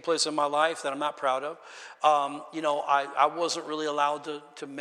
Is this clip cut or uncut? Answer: uncut